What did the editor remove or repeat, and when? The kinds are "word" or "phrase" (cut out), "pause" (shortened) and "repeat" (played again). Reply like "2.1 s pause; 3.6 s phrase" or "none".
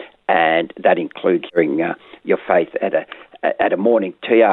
1.5 s phrase